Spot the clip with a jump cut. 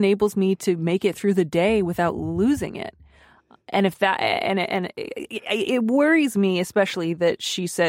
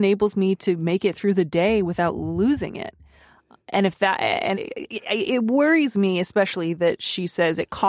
second; 1 cut; at 4.5 s

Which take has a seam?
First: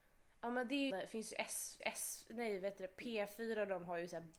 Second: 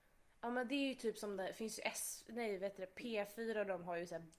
first; 2 cuts; at 0.9 s, 1.8 s

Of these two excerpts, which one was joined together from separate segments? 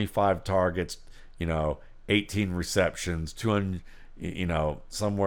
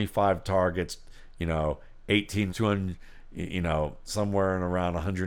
second; 1 cut; at 2.5 s

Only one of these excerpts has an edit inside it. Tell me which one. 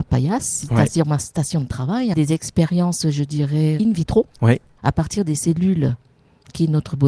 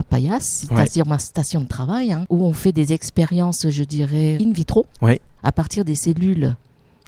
first; 1 cut; at 2.1 s

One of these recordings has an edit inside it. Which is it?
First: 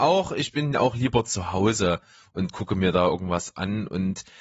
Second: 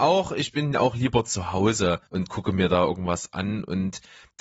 second; 1 cut; at 2.1 s

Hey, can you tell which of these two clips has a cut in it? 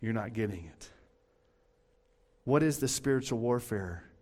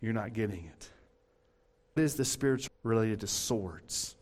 second; 2 cuts; at 2.0 s, 2.7 s

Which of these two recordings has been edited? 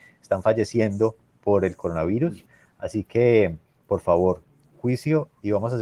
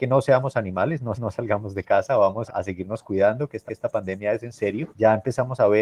second; 4 cuts; at 1.1 s, 2.5 s, 3.7 s, 4.9 s

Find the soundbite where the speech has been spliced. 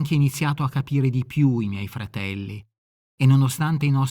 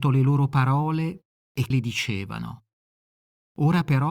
second; 1 cut; at 1.7 s

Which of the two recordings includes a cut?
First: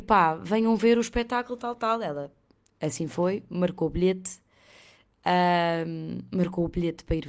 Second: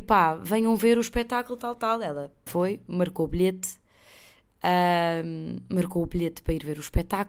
second; 1 cut; at 2.5 s

